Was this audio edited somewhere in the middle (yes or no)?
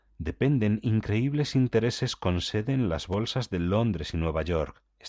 no